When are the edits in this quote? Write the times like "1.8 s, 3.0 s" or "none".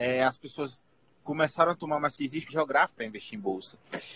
2.2 s, 2.5 s, 2.9 s